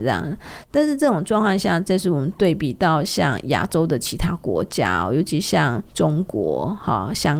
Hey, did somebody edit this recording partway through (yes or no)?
yes